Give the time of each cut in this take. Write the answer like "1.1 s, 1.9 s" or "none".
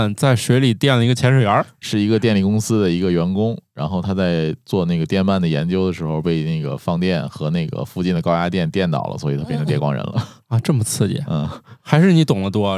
11.8 s